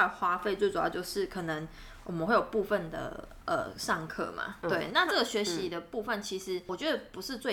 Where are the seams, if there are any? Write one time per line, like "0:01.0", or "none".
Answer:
0:04.6